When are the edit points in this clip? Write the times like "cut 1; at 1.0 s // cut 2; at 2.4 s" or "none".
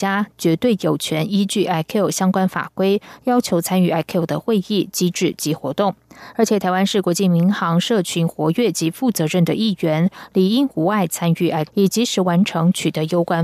cut 1; at 11.7 s